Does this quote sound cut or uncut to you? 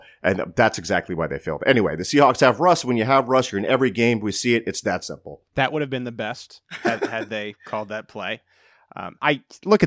uncut